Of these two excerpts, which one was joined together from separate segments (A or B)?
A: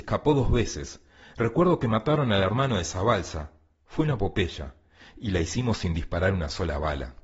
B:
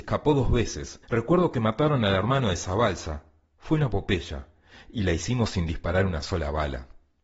B